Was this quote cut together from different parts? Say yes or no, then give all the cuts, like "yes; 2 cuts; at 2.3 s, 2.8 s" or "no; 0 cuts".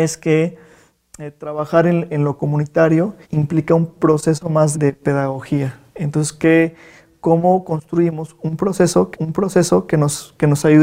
yes; 4 cuts; at 3.2 s, 4.7 s, 5.9 s, 9.1 s